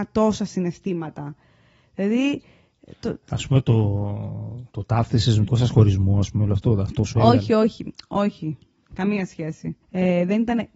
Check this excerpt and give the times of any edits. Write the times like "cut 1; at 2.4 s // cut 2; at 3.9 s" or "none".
cut 1; at 4.7 s // cut 2; at 5.5 s // cut 3; at 9.8 s